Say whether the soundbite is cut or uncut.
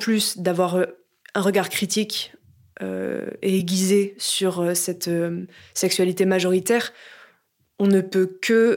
uncut